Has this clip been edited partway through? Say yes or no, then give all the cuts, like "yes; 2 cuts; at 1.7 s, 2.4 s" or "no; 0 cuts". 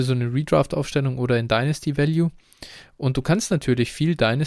no; 0 cuts